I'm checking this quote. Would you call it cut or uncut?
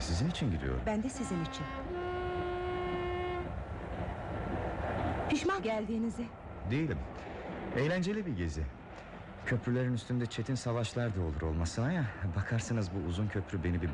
cut